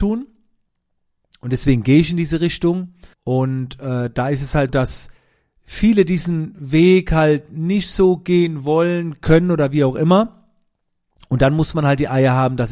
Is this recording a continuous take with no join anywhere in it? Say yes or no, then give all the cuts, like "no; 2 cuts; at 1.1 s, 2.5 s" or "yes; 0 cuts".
no; 2 cuts; at 3.1 s, 4.7 s